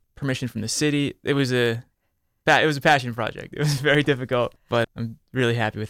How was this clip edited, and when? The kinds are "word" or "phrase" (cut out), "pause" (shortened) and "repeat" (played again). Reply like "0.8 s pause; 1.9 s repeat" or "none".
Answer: 4.8 s word